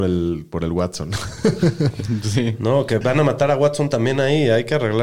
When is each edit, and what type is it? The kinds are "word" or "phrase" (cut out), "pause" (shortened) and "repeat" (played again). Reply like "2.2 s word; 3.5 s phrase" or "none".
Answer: 3.0 s word